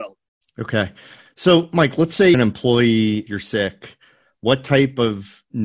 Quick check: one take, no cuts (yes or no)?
no